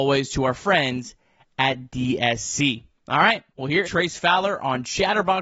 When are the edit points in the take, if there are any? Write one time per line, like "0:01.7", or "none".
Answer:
0:02.9
0:03.5
0:03.8